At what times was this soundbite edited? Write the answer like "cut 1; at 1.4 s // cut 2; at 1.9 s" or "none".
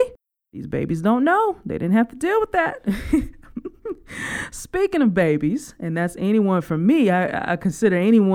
none